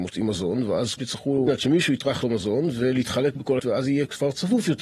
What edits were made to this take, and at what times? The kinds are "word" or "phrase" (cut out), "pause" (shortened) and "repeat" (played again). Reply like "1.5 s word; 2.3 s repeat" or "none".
1.0 s word; 1.5 s word; 2.2 s word; 3.6 s word